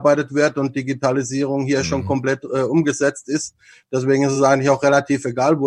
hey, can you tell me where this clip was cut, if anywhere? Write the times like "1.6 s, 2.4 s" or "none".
none